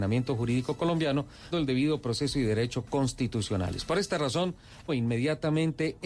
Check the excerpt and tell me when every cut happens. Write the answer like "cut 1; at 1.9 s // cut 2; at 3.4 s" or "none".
cut 1; at 1.5 s // cut 2; at 4.9 s